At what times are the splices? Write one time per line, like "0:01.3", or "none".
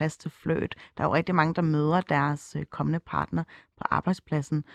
none

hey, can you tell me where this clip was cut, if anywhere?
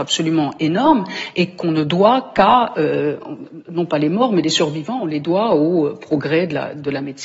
none

